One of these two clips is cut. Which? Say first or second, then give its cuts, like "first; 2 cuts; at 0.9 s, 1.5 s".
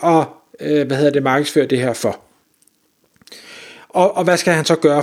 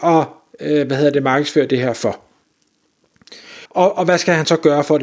second; 1 cut; at 3.7 s